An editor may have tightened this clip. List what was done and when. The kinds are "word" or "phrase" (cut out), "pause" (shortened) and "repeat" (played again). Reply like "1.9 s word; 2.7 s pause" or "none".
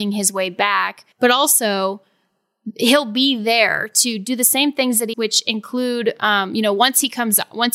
1.1 s pause; 5.1 s phrase